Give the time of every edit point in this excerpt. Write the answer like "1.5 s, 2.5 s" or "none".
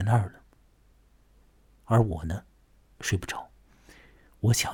none